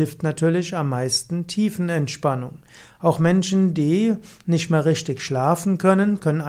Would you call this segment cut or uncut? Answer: uncut